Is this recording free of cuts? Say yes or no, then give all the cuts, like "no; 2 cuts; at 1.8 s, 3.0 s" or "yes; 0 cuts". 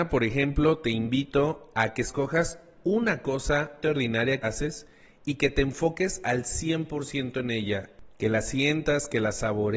no; 2 cuts; at 3.8 s, 4.4 s